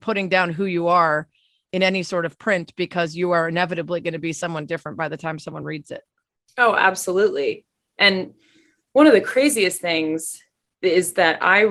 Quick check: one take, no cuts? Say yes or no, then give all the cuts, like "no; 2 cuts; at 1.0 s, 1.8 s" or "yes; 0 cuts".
yes; 0 cuts